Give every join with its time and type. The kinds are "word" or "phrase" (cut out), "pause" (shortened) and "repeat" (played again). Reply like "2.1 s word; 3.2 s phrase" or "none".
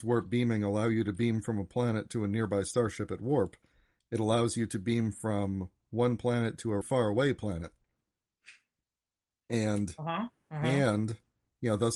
6.8 s word